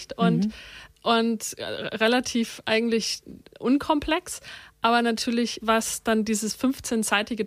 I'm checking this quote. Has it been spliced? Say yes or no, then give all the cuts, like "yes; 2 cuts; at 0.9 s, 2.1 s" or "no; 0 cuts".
yes; 2 cuts; at 0.9 s, 5.6 s